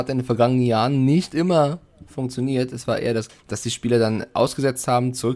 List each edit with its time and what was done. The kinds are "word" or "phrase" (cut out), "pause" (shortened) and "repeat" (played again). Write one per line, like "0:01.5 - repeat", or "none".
0:03.3 - word